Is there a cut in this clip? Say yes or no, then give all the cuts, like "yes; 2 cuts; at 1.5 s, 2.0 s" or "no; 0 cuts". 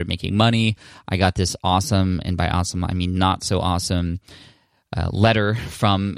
no; 0 cuts